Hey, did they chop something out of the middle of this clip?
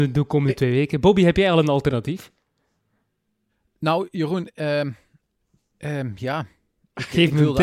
no; 0 cuts

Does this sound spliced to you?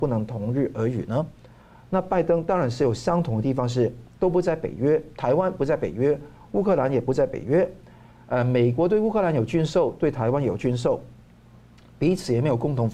no; 0 cuts

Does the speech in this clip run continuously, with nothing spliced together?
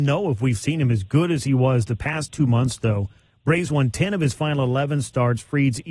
yes; 0 cuts

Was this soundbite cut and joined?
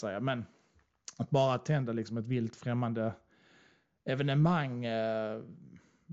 no; 0 cuts

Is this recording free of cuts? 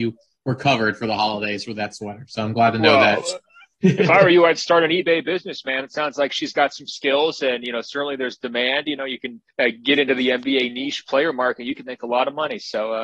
no; 1 cut; at 9.5 s

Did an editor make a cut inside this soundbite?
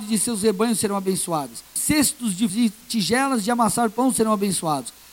yes; 2 cuts; at 1.8 s, 2.5 s

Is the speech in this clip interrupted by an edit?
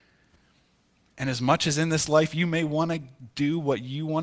no; 0 cuts

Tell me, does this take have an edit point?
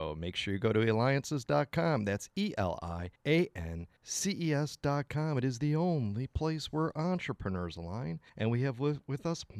yes; 3 cuts; at 3.2 s, 4.0 s, 8.3 s

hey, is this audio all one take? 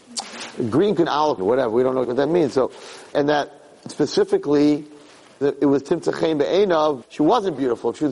no; 6 cuts; at 1.1 s, 1.4 s, 2.0 s, 3.1 s, 5.4 s, 7.0 s

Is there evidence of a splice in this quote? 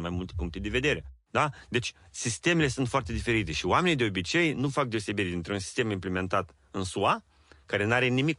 no; 0 cuts

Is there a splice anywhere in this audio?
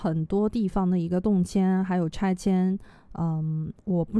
no; 0 cuts

